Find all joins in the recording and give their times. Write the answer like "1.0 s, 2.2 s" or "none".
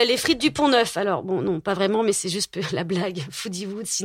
none